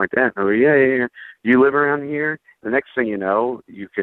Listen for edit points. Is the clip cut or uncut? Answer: uncut